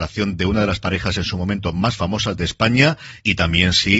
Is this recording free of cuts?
yes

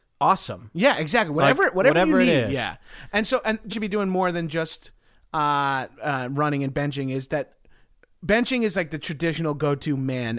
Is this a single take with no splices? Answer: no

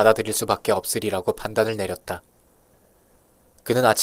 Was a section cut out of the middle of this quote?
no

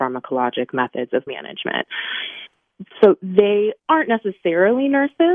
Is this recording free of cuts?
no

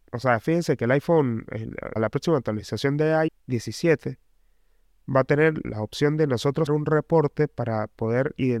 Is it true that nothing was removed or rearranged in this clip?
no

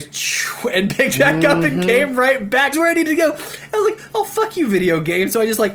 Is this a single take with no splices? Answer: no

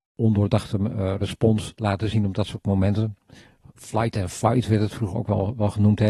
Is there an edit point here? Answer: no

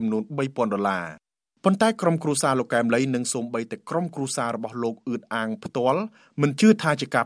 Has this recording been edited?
no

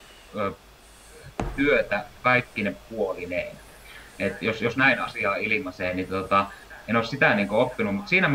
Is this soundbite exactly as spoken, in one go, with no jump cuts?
no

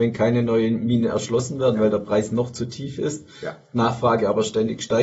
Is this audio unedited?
yes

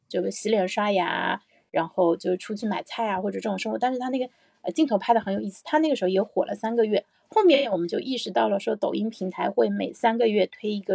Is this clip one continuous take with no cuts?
yes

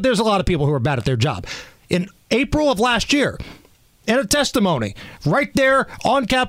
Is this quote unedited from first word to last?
yes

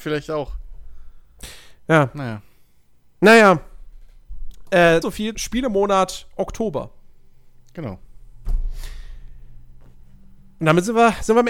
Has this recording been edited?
yes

